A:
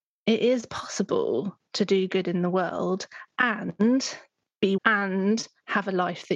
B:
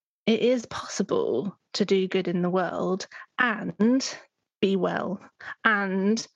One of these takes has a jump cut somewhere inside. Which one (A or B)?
A